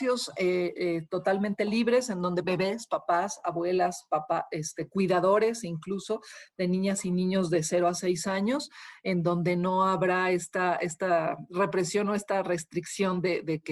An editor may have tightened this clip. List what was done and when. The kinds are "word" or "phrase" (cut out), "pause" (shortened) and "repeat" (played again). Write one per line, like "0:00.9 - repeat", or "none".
0:02.4 - phrase